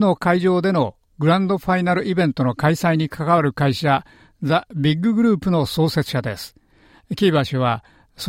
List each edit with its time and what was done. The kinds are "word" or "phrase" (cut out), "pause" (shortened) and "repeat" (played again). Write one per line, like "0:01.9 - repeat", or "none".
none